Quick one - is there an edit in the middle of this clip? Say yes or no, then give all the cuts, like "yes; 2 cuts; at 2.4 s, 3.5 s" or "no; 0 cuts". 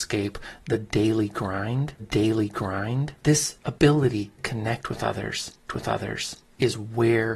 yes; 3 cuts; at 2.0 s, 4.4 s, 5.7 s